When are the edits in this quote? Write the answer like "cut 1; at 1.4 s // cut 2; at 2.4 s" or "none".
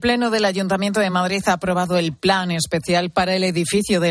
none

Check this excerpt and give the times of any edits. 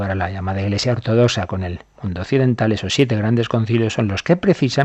none

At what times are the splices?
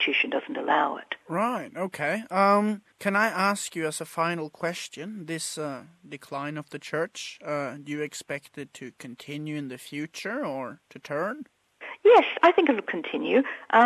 cut 1; at 1.2 s // cut 2; at 2.9 s // cut 3; at 10.8 s

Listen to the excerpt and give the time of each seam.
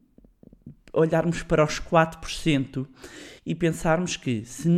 cut 1; at 3.4 s

